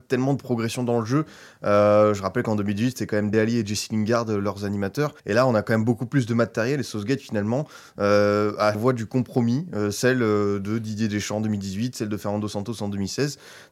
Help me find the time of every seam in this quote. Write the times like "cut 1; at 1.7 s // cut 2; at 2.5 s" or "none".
cut 1; at 3.3 s // cut 2; at 5.2 s // cut 3; at 8.7 s